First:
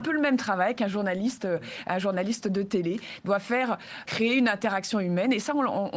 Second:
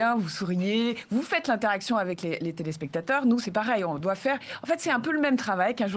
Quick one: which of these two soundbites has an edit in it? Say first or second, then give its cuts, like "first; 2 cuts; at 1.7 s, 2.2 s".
first; 1 cut; at 4.1 s